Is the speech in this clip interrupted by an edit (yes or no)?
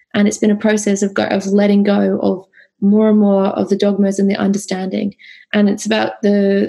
no